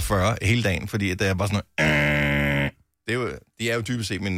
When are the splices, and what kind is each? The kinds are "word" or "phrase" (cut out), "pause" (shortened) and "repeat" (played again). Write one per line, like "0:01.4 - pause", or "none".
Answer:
0:02.9 - pause